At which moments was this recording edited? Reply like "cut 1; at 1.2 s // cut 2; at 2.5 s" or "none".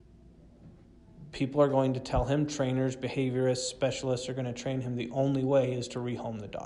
none